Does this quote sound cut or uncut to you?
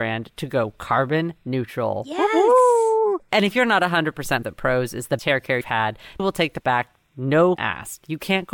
cut